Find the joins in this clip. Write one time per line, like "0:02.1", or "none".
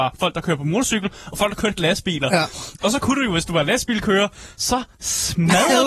0:01.8